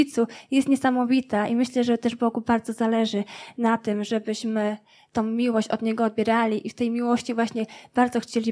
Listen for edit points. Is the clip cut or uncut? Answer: uncut